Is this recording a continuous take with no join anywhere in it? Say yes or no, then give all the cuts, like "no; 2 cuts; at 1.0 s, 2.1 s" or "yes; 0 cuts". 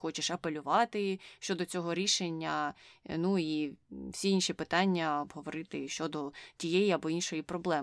yes; 0 cuts